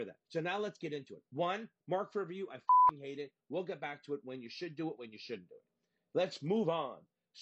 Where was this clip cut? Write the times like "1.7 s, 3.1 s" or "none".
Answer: 1.3 s